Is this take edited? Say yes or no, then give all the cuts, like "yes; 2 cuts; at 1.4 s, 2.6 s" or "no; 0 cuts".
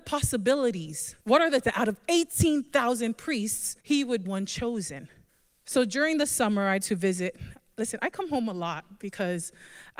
yes; 6 cuts; at 1.2 s, 1.6 s, 3.8 s, 4.2 s, 5.3 s, 6.8 s